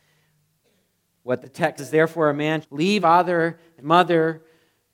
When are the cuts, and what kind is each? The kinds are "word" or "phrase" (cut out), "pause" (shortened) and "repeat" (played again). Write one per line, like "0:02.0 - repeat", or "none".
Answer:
0:01.4 - word
0:01.8 - word
0:02.6 - word
0:03.0 - word
0:03.8 - word